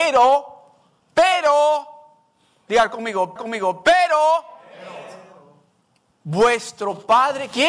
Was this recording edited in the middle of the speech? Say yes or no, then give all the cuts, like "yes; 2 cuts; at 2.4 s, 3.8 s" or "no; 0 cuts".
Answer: yes; 2 cuts; at 1.0 s, 3.4 s